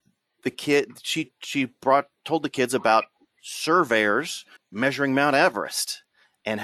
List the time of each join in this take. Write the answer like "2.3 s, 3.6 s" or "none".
4.6 s